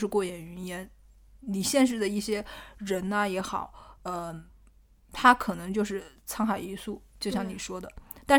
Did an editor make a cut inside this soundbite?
no; 0 cuts

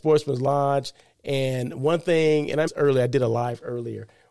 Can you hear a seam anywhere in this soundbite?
yes; 1 cut; at 2.7 s

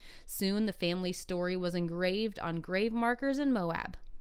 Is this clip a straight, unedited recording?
yes; 0 cuts

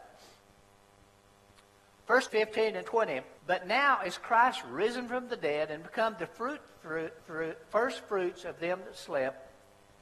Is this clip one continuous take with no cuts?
no; 3 cuts; at 2.3 s, 3.4 s, 7.2 s

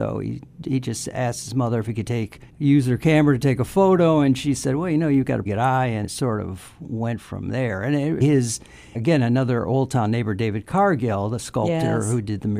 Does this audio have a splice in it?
yes; 5 cuts; at 2.5 s, 5.5 s, 6.0 s, 8.2 s, 8.9 s

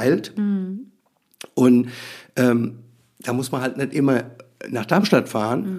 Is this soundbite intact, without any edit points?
yes; 0 cuts

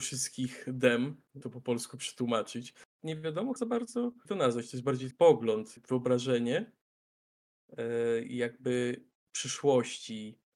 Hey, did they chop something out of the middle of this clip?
yes; 5 cuts; at 1.4 s, 3.6 s, 4.2 s, 5.1 s, 5.8 s

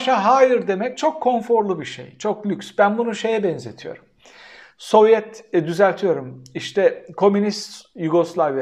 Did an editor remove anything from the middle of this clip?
no; 0 cuts

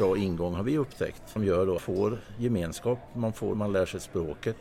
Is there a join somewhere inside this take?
yes; 3 cuts; at 1.4 s, 1.8 s, 3.5 s

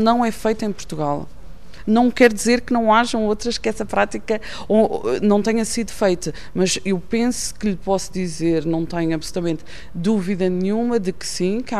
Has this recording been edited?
no; 0 cuts

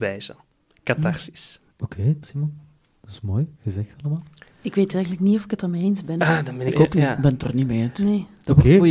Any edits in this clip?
yes; 4 cuts; at 1.7 s, 2.2 s, 3.5 s, 6.7 s

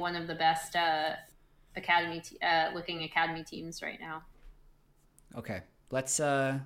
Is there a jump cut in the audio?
no; 0 cuts

